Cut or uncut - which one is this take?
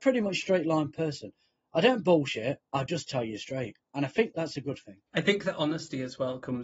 cut